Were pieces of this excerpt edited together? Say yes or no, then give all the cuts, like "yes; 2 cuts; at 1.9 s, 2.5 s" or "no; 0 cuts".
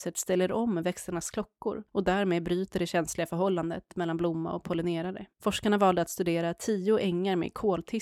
yes; 2 cuts; at 1.9 s, 5.3 s